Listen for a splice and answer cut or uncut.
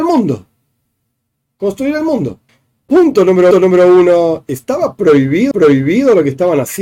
cut